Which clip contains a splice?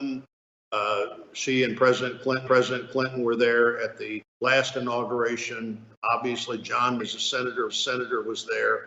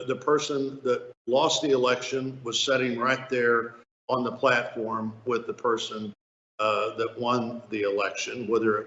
first; 4 cuts; at 2.5 s, 4.3 s, 7.0 s, 7.7 s

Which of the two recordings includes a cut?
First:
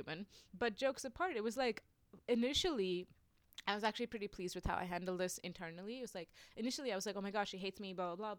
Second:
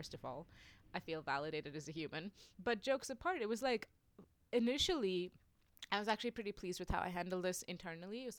first; 1 cut; at 2.2 s

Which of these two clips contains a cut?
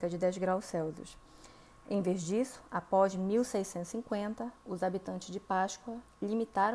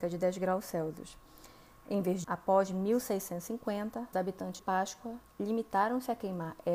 second; 3 cuts; at 2.2 s, 4.1 s, 4.6 s

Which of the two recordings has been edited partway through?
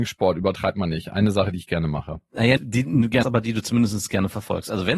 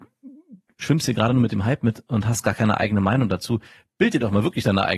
first; 2 cuts; at 2.6 s, 3.2 s

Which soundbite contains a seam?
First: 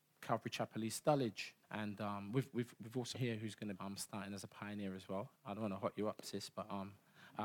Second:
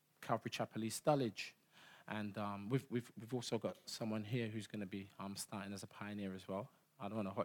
first; 4 cuts; at 1.6 s, 3.1 s, 3.7 s, 5.3 s

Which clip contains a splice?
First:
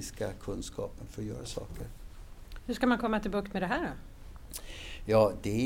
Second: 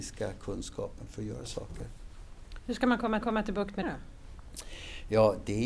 second; 2 cuts; at 3.2 s, 3.8 s

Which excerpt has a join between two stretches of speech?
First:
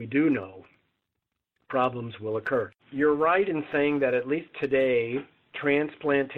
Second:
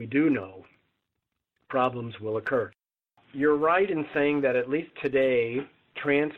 first; 1 cut; at 2.8 s

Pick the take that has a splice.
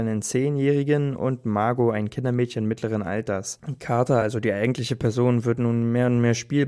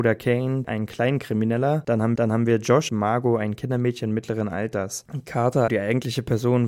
second; 3 cuts; at 2.2 s, 2.9 s, 5.7 s

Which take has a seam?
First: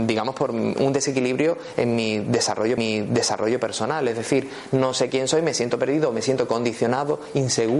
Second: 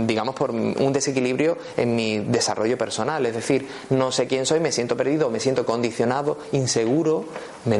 first; 1 cut; at 2.8 s

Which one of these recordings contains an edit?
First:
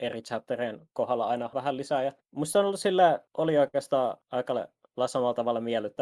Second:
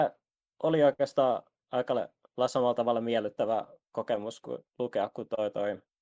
first; 4 cuts; at 1.5 s, 2.2 s, 3.3 s, 4.2 s

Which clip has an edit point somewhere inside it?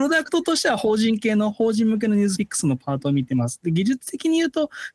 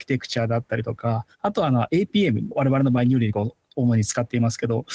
second; 1 cut; at 1.3 s

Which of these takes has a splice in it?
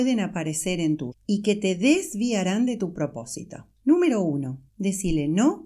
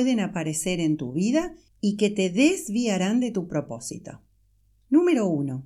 first; 3 cuts; at 1.1 s, 3.7 s, 4.7 s

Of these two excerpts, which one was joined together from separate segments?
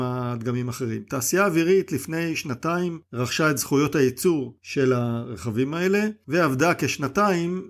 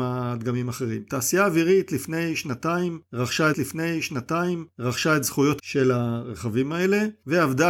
second; 2 cuts; at 3.5 s, 5.6 s

